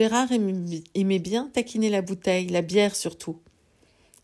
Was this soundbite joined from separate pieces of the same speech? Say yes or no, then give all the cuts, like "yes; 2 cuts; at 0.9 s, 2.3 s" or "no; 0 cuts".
no; 0 cuts